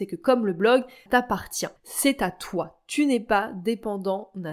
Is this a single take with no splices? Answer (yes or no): no